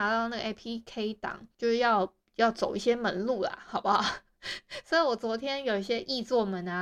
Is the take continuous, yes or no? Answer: yes